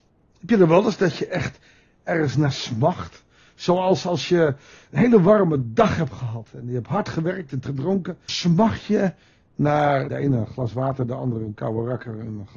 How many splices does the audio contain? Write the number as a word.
three